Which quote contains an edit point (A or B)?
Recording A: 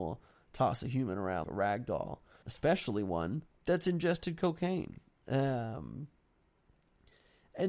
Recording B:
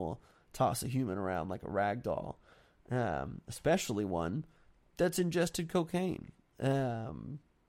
A